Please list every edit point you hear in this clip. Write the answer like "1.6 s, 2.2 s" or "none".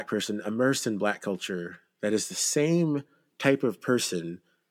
none